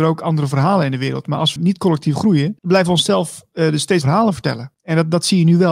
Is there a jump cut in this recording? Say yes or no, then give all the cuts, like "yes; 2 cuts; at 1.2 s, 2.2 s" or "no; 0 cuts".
yes; 4 cuts; at 1.6 s, 2.6 s, 4.0 s, 4.7 s